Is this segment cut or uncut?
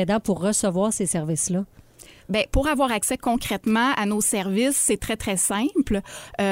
uncut